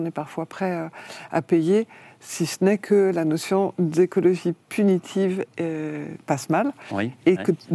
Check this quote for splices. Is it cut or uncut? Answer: uncut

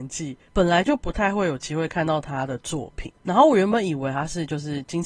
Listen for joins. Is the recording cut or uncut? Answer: cut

